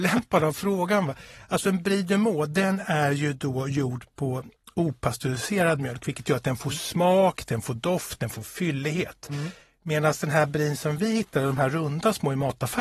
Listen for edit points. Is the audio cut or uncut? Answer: uncut